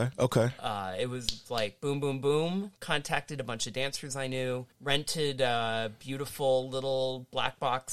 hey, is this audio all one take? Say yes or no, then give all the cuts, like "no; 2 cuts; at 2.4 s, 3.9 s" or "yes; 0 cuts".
no; 1 cut; at 4.7 s